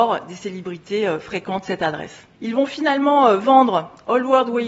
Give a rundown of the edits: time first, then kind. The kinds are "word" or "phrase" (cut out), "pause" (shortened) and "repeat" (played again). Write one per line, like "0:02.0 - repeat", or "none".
0:02.3 - pause